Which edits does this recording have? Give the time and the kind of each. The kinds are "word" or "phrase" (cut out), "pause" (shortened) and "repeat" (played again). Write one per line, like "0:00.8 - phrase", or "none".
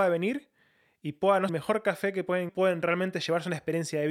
0:01.5 - phrase
0:02.5 - phrase